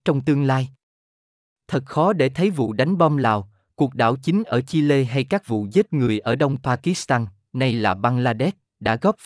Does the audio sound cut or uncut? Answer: uncut